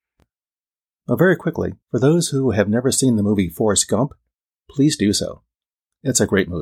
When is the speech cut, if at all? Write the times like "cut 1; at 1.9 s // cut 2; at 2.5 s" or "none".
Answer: cut 1; at 1.8 s